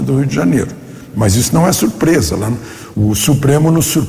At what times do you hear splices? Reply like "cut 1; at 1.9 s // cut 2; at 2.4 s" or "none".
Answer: cut 1; at 2.9 s